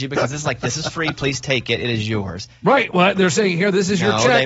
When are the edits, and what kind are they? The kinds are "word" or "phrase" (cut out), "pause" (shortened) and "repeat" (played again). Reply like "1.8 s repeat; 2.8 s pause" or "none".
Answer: none